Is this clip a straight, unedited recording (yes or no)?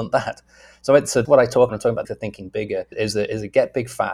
no